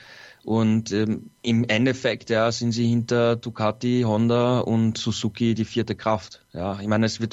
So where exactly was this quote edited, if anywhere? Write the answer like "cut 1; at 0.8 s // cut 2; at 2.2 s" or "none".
cut 1; at 1.4 s